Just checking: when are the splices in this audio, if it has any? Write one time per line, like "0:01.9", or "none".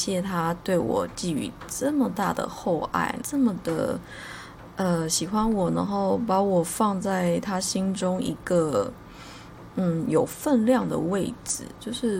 0:03.2

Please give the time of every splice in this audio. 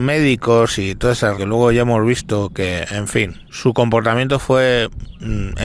0:01.3
0:03.5

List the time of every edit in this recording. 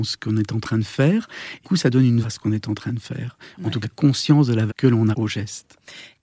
0:01.6
0:02.2
0:03.8
0:04.7
0:05.1

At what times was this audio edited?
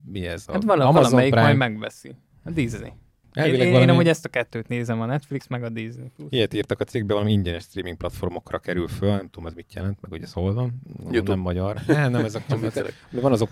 none

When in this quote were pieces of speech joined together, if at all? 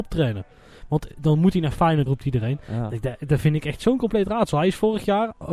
0:02.1

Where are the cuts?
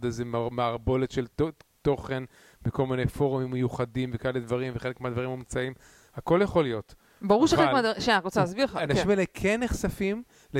none

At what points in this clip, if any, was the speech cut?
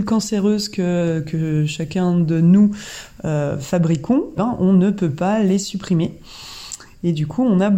0:04.4

